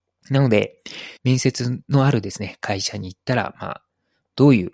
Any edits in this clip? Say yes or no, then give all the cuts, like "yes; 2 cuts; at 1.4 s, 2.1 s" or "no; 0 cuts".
yes; 1 cut; at 1.2 s